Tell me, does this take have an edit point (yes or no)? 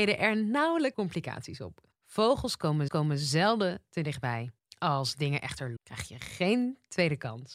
yes